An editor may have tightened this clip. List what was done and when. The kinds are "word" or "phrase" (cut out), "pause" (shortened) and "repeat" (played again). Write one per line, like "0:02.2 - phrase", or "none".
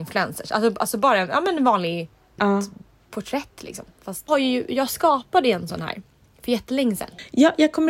0:02.4 - word
0:04.3 - phrase